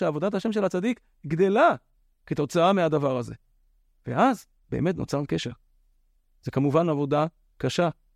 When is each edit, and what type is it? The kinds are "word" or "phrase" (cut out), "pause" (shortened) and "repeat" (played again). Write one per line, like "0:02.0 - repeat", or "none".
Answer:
none